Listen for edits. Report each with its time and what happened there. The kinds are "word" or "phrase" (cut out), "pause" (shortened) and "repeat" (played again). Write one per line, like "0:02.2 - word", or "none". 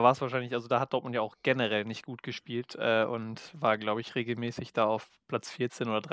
none